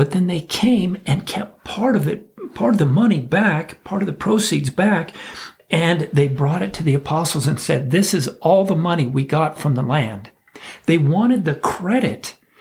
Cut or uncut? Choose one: uncut